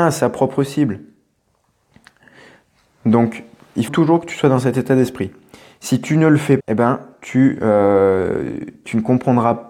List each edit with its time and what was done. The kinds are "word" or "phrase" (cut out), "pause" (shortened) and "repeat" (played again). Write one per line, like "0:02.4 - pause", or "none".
0:03.9 - word
0:06.6 - word